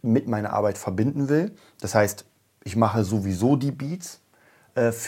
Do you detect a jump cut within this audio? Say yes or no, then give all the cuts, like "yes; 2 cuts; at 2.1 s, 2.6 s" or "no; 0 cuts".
no; 0 cuts